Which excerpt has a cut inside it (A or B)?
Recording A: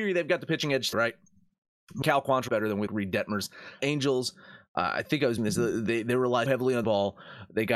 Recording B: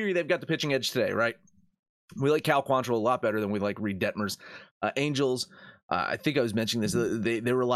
A